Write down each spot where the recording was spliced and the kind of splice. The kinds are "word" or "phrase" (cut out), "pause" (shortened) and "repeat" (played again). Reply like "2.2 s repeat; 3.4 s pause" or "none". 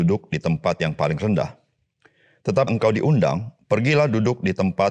2.7 s word